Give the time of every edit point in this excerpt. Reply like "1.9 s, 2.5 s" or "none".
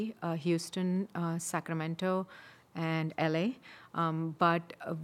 none